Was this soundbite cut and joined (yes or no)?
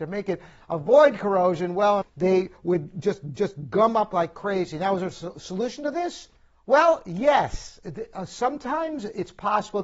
yes